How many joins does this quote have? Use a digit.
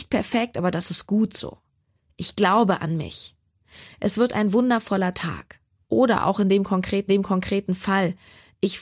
1